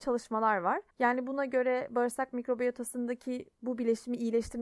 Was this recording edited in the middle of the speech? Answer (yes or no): yes